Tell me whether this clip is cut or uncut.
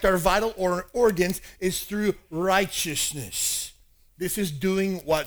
uncut